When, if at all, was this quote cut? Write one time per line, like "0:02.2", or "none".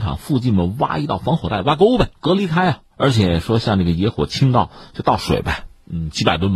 0:02.1
0:02.9